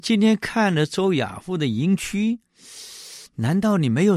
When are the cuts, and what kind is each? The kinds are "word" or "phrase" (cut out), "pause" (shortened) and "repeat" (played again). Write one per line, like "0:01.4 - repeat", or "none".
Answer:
0:03.3 - pause